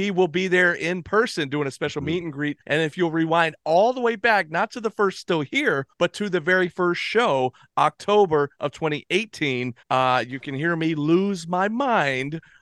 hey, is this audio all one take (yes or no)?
no